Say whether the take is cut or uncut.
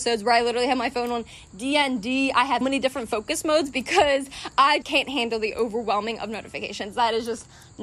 cut